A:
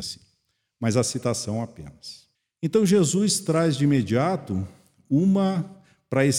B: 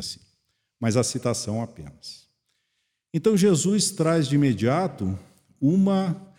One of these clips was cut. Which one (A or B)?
A